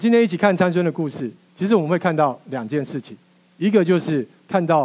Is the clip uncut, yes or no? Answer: yes